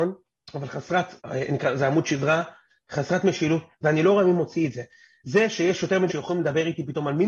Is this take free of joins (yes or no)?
no